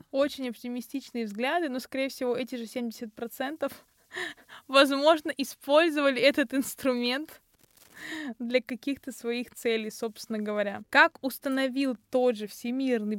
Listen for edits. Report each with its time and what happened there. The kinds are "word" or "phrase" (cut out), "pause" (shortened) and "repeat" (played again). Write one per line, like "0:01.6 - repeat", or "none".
none

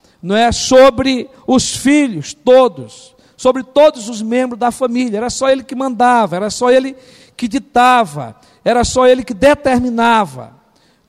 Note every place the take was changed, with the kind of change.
none

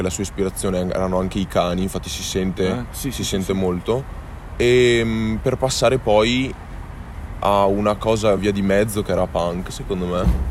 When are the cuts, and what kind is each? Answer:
none

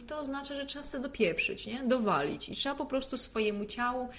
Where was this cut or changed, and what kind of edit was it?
none

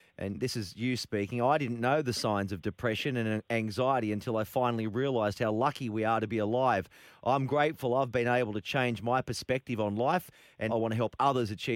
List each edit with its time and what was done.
0:10.7 - word

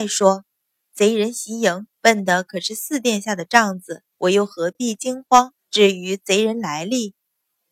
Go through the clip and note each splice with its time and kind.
0:01.9 - pause
0:04.1 - pause
0:05.6 - pause

